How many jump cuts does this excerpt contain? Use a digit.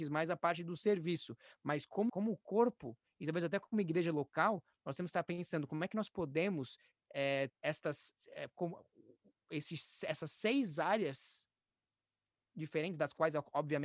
3